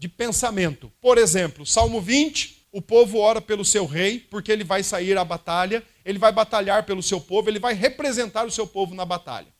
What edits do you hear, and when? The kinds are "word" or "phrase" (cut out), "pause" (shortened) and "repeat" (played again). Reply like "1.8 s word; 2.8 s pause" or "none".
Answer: 0.9 s pause; 2.6 s pause